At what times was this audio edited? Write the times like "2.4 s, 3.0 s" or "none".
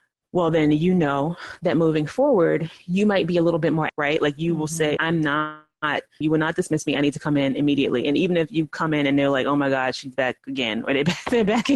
3.9 s, 5.0 s, 6.2 s

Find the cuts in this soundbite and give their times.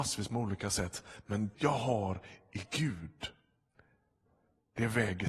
1.5 s

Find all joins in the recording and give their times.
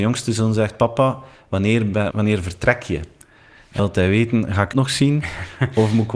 2.1 s, 3.8 s, 4.7 s

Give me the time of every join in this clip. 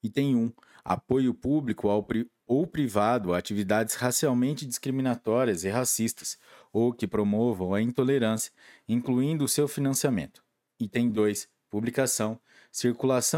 none

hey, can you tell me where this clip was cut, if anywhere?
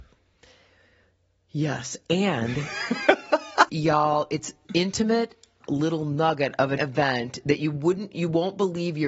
3.7 s, 4.6 s, 5.6 s, 6.8 s

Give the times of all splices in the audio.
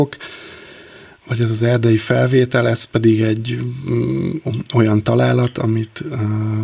none

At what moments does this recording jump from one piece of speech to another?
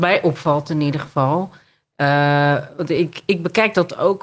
none

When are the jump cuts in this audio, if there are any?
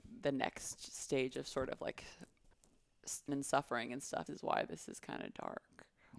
3.3 s, 4.3 s

